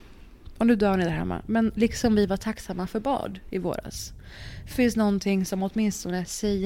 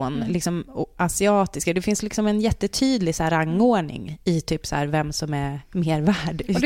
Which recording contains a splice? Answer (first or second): first